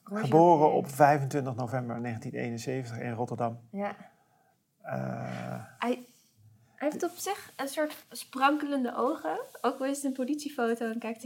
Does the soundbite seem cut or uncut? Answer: uncut